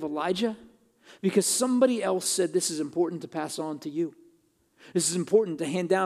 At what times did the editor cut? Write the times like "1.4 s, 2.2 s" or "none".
none